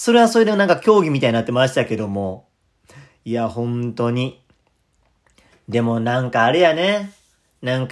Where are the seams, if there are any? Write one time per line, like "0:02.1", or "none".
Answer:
none